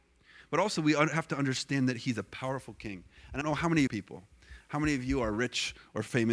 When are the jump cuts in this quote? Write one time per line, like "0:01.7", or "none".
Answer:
0:03.4
0:03.9